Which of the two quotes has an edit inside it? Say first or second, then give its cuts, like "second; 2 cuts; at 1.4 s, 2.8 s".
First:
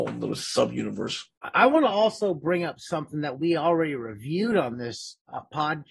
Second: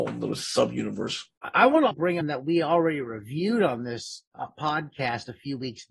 second; 2 cuts; at 1.9 s, 2.2 s